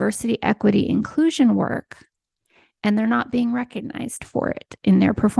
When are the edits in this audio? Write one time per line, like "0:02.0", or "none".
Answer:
none